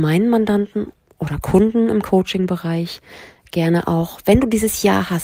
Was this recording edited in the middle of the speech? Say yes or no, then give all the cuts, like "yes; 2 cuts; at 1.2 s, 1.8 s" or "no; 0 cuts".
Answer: no; 0 cuts